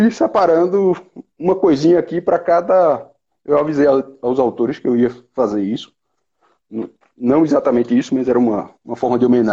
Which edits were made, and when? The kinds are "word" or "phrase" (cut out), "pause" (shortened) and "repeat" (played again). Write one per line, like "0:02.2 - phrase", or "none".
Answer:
none